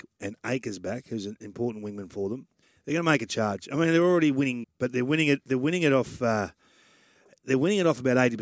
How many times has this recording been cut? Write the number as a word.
two